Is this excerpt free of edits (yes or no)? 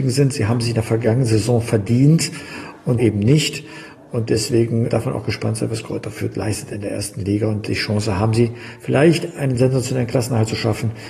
no